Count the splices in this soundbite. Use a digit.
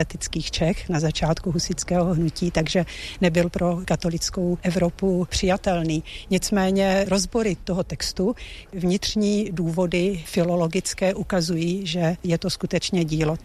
0